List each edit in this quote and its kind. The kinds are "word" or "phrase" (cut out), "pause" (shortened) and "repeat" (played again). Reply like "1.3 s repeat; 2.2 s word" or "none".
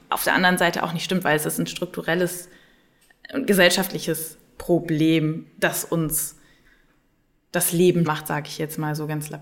8.1 s word